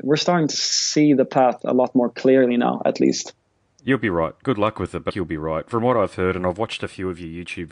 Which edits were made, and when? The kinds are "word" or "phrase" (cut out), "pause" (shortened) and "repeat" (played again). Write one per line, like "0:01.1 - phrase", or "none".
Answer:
0:05.1 - phrase

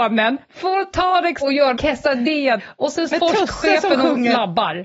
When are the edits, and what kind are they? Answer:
0:01.4 - word
0:01.7 - word
0:02.6 - word
0:03.1 - word

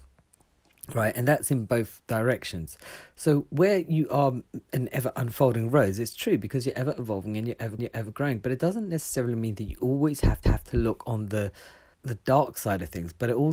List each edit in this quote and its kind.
0:07.8 - repeat
0:10.4 - repeat
0:11.9 - word

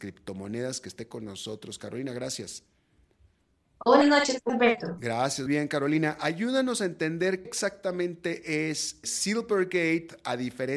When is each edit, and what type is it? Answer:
0:04.0 - word
0:04.5 - word
0:05.5 - word
0:07.4 - word
0:09.0 - word

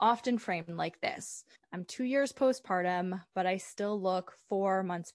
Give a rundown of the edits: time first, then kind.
0:01.5 - pause

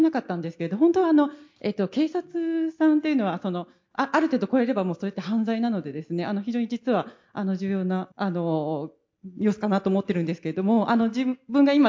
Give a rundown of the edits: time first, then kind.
0:08.1 - pause

